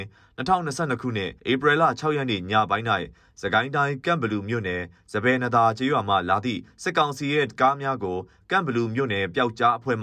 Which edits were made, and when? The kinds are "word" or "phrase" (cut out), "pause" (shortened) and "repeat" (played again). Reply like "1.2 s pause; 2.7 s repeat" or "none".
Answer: 1.4 s pause